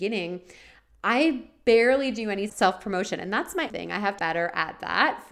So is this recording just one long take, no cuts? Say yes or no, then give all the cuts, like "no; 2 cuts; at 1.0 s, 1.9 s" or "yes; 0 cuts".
no; 3 cuts; at 2.5 s, 3.7 s, 4.2 s